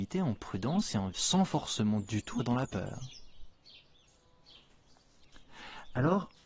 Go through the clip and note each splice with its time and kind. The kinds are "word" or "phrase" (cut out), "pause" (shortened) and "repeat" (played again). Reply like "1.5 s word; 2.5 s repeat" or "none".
1.1 s word; 2.4 s word